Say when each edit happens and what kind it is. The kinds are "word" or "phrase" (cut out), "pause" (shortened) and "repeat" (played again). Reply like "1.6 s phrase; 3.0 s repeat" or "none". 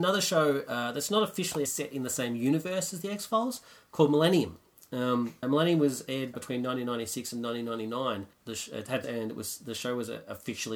1.7 s phrase; 5.4 s word; 6.3 s word; 9.0 s phrase